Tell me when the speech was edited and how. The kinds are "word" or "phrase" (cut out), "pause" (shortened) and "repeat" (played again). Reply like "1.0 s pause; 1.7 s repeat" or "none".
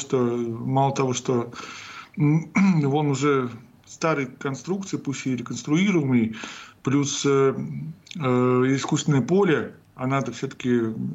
none